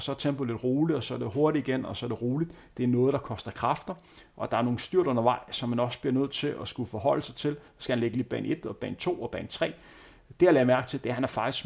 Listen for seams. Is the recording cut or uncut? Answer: uncut